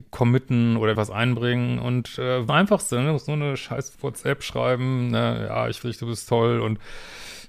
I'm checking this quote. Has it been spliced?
yes; 4 cuts; at 0.9 s, 2.5 s, 3.9 s, 5.8 s

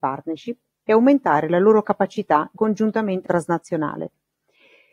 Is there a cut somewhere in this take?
yes; 2 cuts; at 2.6 s, 3.2 s

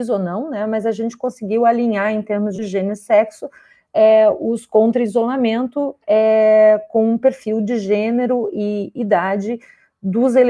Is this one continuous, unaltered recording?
yes; 0 cuts

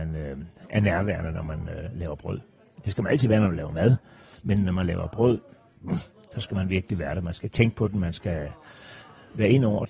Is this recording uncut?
yes; 0 cuts

